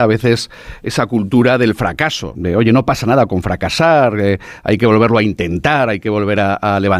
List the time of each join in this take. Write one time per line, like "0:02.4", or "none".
0:02.3